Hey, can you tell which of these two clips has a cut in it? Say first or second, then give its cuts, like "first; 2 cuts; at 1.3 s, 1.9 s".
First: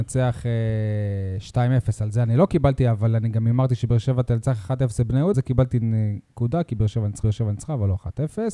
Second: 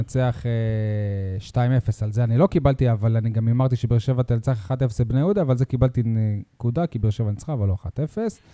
first; 2 cuts; at 5.3 s, 7.2 s